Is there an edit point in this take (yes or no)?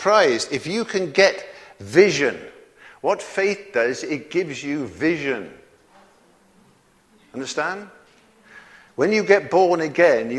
no